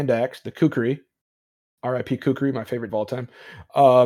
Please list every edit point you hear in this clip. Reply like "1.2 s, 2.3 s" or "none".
2.9 s